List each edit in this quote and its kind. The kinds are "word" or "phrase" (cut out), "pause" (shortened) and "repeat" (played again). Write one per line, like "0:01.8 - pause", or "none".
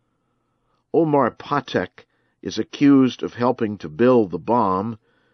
none